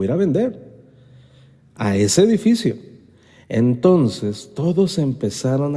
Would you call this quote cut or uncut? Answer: uncut